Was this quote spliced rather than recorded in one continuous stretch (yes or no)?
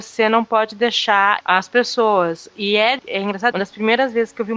yes